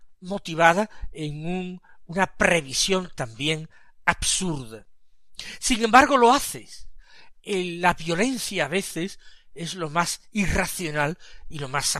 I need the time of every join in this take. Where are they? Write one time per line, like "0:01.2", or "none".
none